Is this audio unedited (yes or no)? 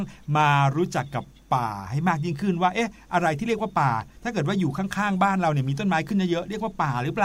yes